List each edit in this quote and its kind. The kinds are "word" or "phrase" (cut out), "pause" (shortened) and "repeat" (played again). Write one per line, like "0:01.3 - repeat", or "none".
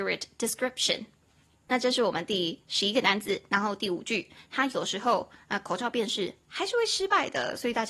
none